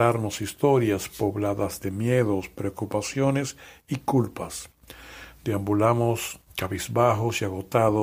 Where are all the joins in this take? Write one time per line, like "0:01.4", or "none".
none